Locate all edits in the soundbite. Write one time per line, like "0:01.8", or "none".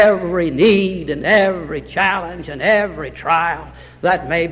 none